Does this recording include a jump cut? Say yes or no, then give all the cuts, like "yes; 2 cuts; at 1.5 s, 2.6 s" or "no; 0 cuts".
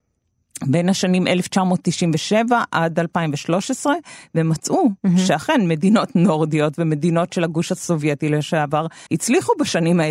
yes; 2 cuts; at 5.0 s, 9.1 s